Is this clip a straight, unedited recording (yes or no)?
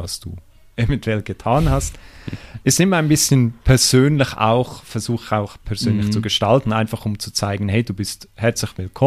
yes